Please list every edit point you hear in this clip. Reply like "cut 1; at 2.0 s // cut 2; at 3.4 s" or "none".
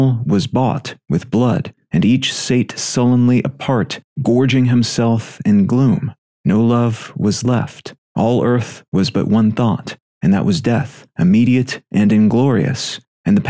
none